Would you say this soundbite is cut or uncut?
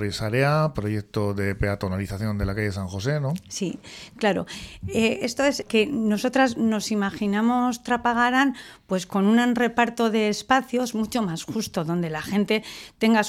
cut